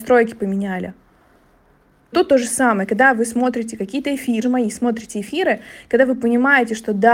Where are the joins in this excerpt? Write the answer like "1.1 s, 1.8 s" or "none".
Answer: 2.1 s, 4.4 s